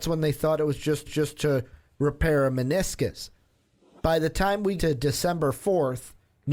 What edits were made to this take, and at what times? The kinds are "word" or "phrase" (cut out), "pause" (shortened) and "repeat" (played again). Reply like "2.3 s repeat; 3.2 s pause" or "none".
1.1 s repeat; 4.8 s word